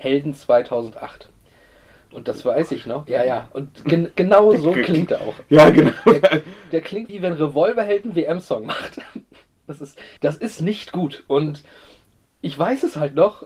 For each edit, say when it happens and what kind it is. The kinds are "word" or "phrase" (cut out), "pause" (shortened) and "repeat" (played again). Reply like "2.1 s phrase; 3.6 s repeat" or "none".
7.1 s word; 10.2 s pause